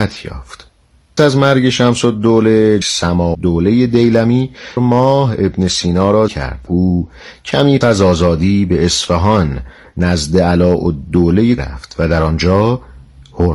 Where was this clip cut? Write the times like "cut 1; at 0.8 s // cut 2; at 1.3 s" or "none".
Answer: cut 1; at 1.2 s // cut 2; at 2.8 s // cut 3; at 3.3 s // cut 4; at 4.8 s // cut 5; at 6.3 s // cut 6; at 6.7 s // cut 7; at 7.8 s // cut 8; at 11.6 s